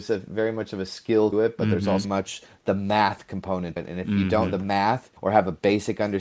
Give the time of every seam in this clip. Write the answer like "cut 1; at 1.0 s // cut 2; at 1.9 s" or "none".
cut 1; at 1.3 s // cut 2; at 2.0 s // cut 3; at 3.8 s // cut 4; at 4.5 s // cut 5; at 5.2 s

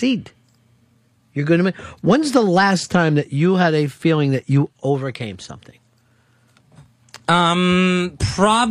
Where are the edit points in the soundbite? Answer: none

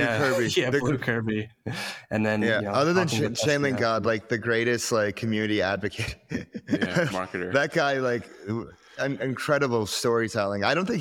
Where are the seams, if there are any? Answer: cut 1; at 7.1 s

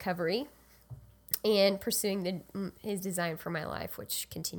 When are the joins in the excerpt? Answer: none

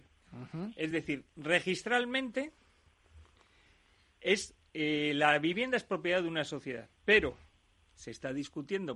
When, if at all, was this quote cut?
none

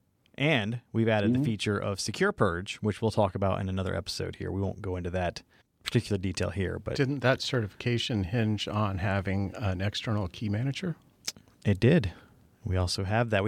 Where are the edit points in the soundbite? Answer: cut 1; at 5.6 s

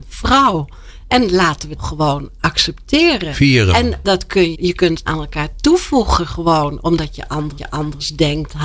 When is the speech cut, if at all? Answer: cut 1; at 1.8 s // cut 2; at 4.0 s // cut 3; at 4.5 s // cut 4; at 5.1 s // cut 5; at 7.6 s

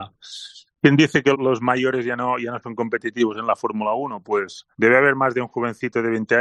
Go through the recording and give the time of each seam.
cut 1; at 1.3 s // cut 2; at 4.7 s

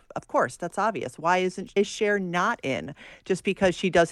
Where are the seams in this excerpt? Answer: cut 1; at 1.8 s

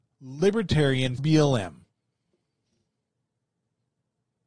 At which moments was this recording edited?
cut 1; at 1.2 s

